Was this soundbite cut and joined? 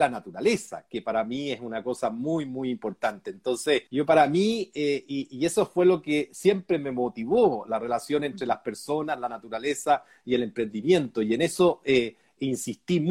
yes; 1 cut; at 3.9 s

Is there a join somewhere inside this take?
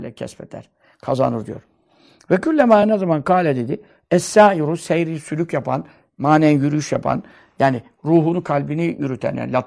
no; 0 cuts

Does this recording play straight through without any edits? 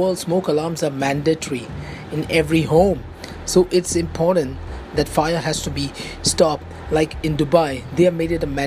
yes; 0 cuts

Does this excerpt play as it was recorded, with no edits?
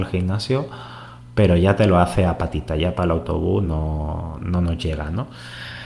yes; 0 cuts

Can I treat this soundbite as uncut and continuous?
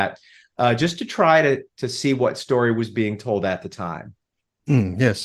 yes; 0 cuts

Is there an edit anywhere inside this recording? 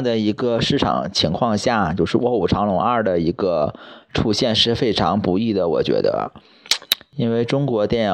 no; 0 cuts

